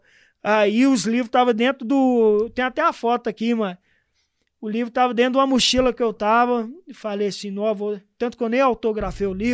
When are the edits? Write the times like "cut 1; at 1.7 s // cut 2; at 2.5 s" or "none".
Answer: none